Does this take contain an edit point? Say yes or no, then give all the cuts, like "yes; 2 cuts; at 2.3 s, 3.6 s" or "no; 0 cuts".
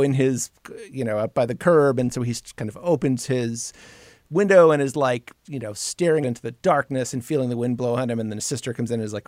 yes; 2 cuts; at 5.4 s, 6.2 s